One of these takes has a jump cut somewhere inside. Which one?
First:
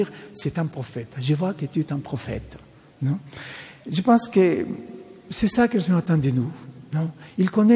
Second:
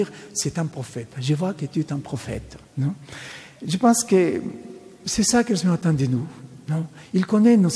second; 1 cut; at 2.7 s

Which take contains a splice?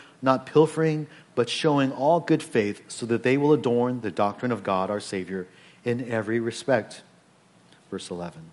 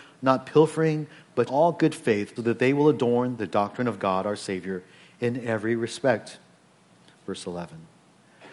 second; 2 cuts; at 1.5 s, 2.4 s

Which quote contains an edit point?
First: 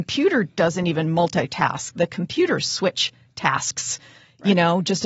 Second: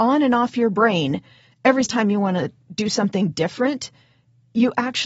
second; 1 cut; at 1.9 s

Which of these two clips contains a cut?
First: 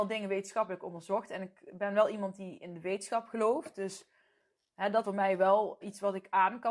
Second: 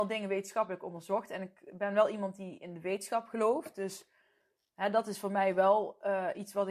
first; 2 cuts; at 5.0 s, 5.8 s

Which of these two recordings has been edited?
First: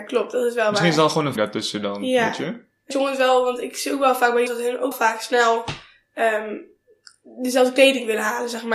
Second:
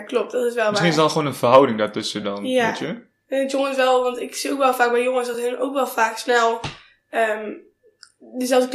first; 4 cuts; at 1.4 s, 2.9 s, 4.5 s, 4.9 s

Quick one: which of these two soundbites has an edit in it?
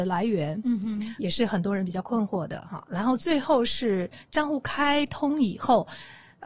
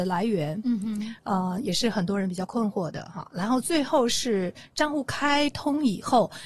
first; 1 cut; at 1.2 s

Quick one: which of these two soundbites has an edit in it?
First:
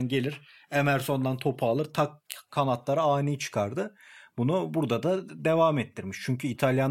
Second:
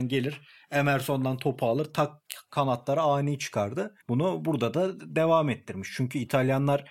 second; 1 cut; at 4.0 s

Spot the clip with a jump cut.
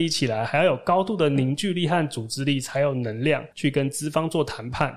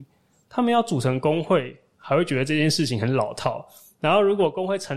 first; 1 cut; at 3.5 s

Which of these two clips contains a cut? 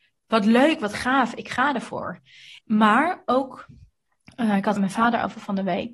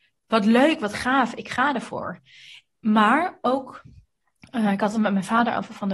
first; 2 cuts; at 2.6 s, 4.8 s

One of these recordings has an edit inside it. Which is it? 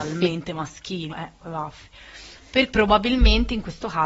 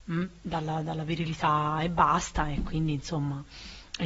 first; 2 cuts; at 1.1 s, 2.7 s

